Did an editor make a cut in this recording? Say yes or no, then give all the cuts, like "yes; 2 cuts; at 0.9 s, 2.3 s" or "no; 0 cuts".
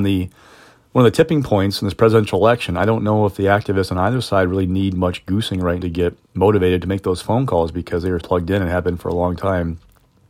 yes; 2 cuts; at 5.8 s, 8.2 s